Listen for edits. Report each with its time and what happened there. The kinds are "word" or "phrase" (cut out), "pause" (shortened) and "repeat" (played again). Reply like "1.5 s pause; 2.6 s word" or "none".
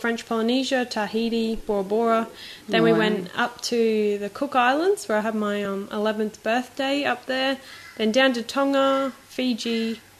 none